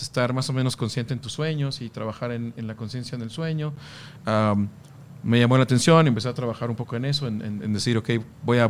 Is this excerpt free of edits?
yes; 0 cuts

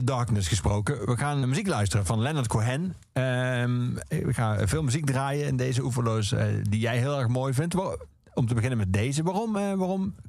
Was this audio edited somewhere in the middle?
yes; 1 cut; at 1.4 s

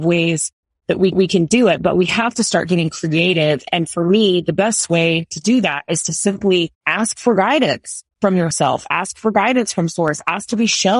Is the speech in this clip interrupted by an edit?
yes; 4 cuts; at 1.1 s, 6.7 s, 8.1 s, 8.5 s

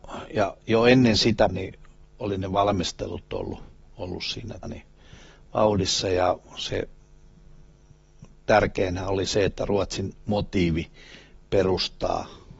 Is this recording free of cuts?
no; 2 cuts; at 1.5 s, 4.6 s

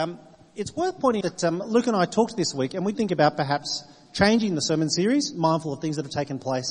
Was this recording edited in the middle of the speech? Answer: yes; 3 cuts; at 1.2 s, 2.9 s, 5.3 s

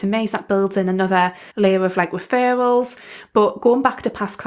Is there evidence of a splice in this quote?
yes; 1 cut; at 1.5 s

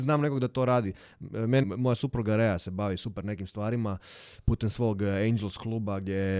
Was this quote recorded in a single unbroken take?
no; 1 cut; at 1.6 s

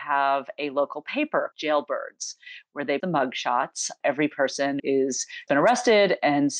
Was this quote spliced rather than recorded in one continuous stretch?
yes; 5 cuts; at 1.5 s, 3.0 s, 4.0 s, 4.8 s, 5.5 s

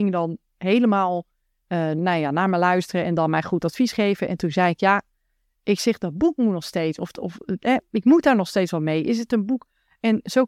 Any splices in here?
no; 0 cuts

